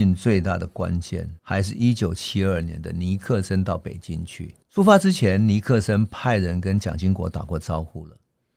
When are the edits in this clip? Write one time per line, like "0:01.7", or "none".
0:01.4
0:04.6